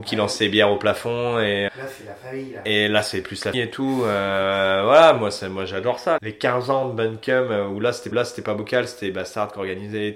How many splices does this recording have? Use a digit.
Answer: 4